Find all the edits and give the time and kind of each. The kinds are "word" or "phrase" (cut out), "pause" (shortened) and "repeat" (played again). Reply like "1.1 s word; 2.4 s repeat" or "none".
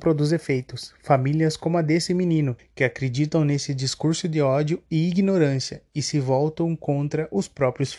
2.6 s pause

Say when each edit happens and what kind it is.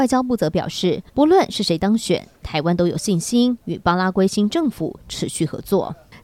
1.1 s pause

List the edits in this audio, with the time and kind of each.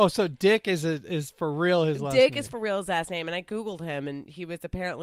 none

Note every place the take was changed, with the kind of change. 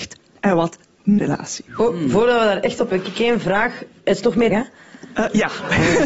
1.2 s phrase; 1.7 s pause; 2.9 s word; 4.5 s word

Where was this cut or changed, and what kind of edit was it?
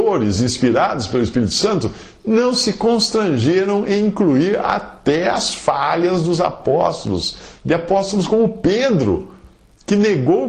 none

